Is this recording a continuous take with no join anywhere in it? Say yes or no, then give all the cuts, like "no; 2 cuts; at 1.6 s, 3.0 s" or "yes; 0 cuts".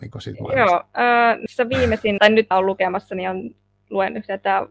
no; 3 cuts; at 1.5 s, 2.2 s, 2.5 s